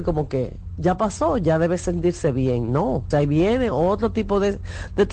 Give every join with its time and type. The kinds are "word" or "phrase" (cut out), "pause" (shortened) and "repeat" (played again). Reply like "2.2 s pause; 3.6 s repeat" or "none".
3.1 s word